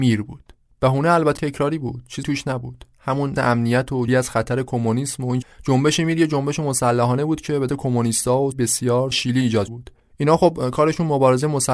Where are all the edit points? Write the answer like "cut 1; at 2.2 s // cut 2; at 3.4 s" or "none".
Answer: cut 1; at 1.4 s // cut 2; at 2.2 s // cut 3; at 3.4 s // cut 4; at 4.1 s // cut 5; at 5.4 s // cut 6; at 7.7 s // cut 7; at 8.5 s // cut 8; at 9.1 s // cut 9; at 9.7 s